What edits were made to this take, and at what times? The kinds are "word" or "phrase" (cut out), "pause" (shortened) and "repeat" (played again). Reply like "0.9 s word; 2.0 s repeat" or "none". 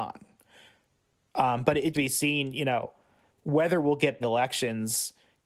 1.9 s phrase; 4.2 s phrase